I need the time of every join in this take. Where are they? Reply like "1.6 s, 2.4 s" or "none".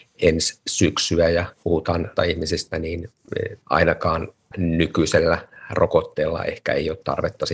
1.6 s, 2.2 s, 3.6 s, 4.5 s